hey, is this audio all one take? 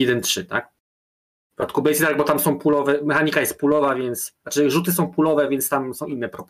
yes; 0 cuts

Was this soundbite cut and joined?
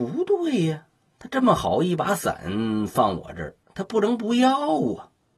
yes; 1 cut; at 3.6 s

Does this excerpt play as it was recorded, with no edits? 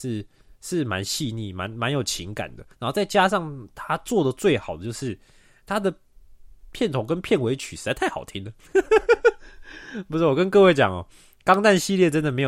no; 1 cut; at 2.7 s

